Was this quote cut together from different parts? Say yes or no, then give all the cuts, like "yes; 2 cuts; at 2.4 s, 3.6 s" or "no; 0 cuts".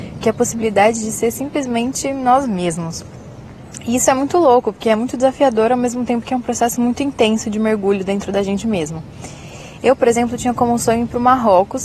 no; 0 cuts